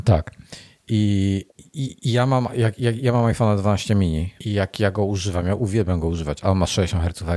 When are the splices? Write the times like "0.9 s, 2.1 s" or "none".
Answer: 1.5 s, 4.4 s